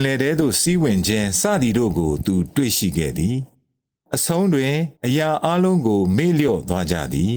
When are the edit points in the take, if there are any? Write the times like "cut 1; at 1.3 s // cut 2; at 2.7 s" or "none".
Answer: cut 1; at 5.0 s